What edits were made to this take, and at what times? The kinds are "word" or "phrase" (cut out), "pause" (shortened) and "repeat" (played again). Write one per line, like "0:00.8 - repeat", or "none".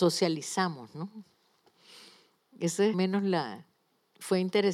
0:02.9 - phrase
0:03.7 - pause